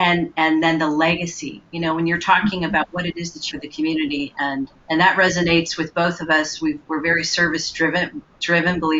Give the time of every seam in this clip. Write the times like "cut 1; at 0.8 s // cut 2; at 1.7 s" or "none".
cut 1; at 3.5 s // cut 2; at 4.7 s